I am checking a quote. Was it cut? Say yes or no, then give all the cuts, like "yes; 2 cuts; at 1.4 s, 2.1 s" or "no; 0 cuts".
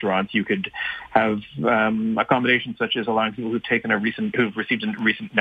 no; 0 cuts